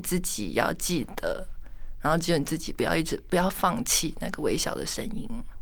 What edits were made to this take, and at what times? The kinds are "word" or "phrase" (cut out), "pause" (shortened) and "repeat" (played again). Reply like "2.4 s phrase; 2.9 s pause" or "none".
none